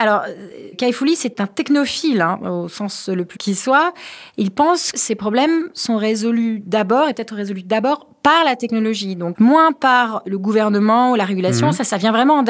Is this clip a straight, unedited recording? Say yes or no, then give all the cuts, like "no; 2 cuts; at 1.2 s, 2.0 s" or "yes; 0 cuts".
no; 4 cuts; at 3.3 s, 4.9 s, 7.1 s, 9.3 s